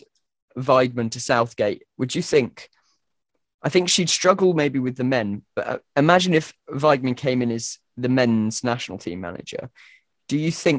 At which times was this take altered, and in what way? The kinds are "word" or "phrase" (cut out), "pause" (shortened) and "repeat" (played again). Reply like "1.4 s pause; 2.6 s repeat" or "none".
6.6 s pause